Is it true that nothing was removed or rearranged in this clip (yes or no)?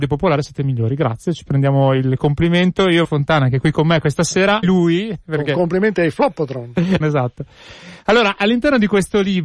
no